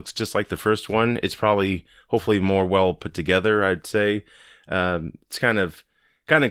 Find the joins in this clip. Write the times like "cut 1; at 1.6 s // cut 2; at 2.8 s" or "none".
none